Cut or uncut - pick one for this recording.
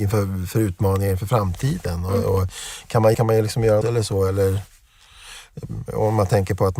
cut